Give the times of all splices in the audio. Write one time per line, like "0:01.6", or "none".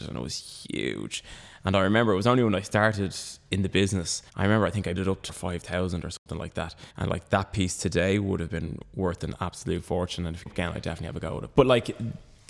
0:04.3
0:05.0
0:05.3
0:06.9
0:10.5